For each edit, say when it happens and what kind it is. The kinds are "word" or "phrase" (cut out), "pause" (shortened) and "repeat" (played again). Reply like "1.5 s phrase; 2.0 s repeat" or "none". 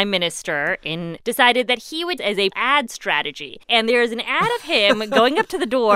1.2 s phrase; 2.2 s phrase; 2.5 s word; 3.6 s pause